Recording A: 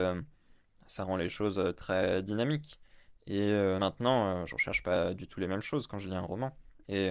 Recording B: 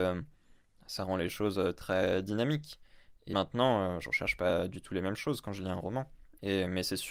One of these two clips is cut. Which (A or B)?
B